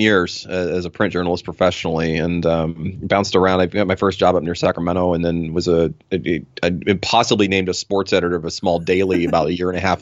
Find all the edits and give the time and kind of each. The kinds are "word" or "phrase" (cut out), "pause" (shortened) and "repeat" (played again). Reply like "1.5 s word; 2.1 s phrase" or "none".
none